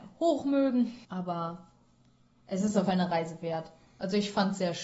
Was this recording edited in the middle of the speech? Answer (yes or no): yes